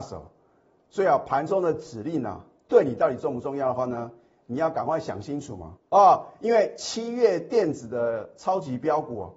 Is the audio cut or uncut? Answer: cut